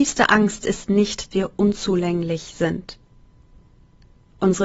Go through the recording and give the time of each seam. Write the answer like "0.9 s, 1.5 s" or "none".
1.3 s